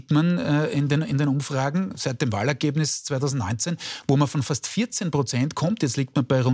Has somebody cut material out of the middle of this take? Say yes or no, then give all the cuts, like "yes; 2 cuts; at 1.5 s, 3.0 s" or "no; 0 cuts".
no; 0 cuts